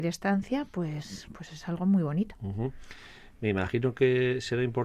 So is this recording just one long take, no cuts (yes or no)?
yes